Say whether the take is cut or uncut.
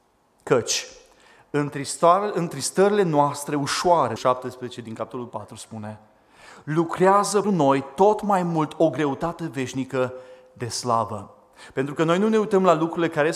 cut